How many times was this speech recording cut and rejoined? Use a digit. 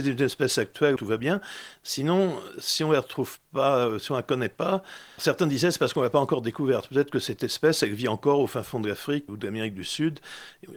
3